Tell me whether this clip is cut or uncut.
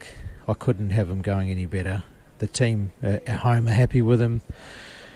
uncut